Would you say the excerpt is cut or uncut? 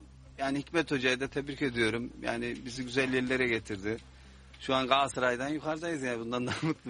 uncut